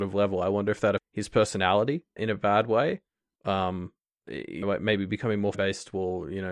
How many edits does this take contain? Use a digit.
4